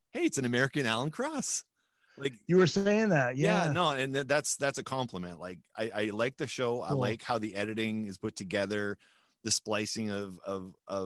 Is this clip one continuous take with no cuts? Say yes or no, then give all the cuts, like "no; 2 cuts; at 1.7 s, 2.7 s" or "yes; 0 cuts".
yes; 0 cuts